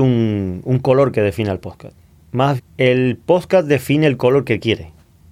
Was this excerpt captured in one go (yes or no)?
no